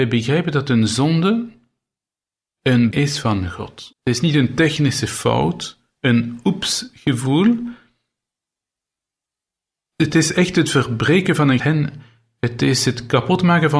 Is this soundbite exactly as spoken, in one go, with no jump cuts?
no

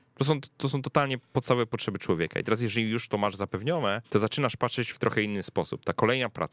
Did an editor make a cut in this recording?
yes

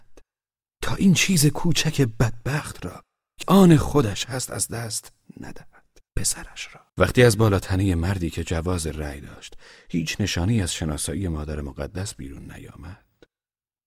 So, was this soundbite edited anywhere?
yes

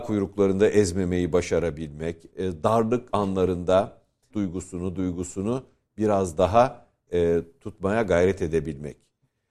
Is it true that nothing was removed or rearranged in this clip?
no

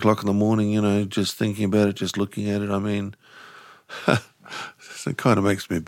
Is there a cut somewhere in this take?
no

